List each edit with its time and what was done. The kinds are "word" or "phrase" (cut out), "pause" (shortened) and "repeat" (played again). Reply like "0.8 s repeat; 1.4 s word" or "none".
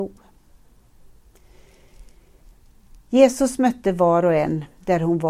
none